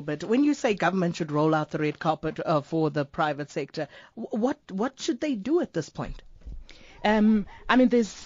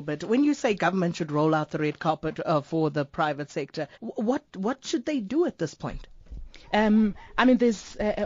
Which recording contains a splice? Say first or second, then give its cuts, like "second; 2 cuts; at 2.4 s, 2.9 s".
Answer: second; 2 cuts; at 3.9 s, 6.6 s